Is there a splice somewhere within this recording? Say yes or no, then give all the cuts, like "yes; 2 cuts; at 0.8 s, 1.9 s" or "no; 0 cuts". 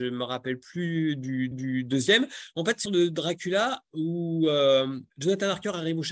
yes; 3 cuts; at 1.5 s, 2.9 s, 5.1 s